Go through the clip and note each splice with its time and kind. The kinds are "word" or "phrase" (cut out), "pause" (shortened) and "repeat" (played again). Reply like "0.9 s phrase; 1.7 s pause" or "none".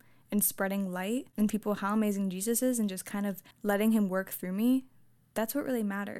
1.5 s word; 3.5 s pause